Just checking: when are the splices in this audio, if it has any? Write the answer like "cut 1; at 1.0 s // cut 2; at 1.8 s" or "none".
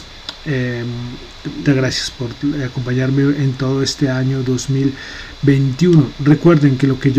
cut 1; at 1.7 s